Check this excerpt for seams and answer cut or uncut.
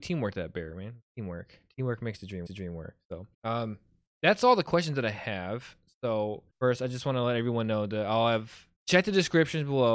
cut